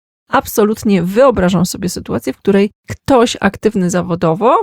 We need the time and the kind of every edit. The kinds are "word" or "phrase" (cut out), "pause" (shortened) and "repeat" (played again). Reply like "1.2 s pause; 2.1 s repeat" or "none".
2.8 s pause